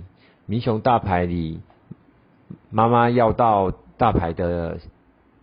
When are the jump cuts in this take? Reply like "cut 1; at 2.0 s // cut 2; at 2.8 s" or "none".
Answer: none